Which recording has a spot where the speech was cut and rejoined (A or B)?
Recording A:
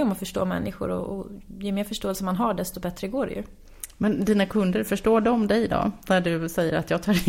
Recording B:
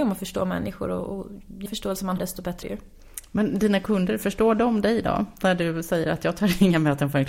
B